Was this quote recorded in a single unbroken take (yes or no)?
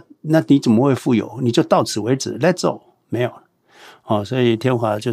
yes